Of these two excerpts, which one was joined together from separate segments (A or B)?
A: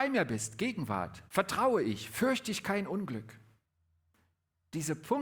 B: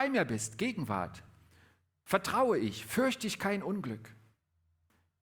A